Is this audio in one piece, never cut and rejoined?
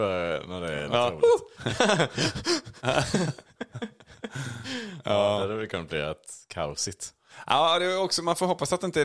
yes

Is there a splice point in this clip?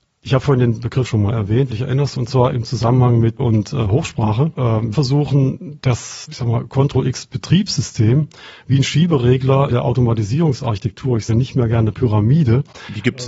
yes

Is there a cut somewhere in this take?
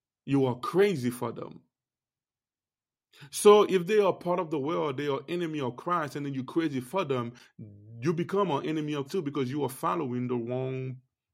yes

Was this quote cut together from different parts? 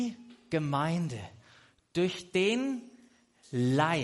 no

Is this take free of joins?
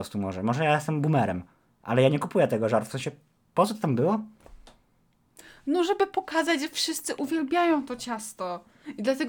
yes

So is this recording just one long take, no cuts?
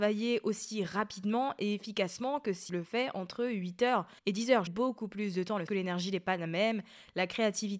no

